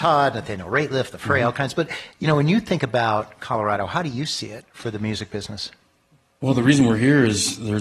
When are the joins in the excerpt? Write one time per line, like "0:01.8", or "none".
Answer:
none